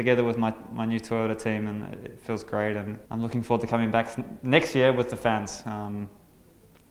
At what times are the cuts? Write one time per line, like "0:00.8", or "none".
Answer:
0:03.1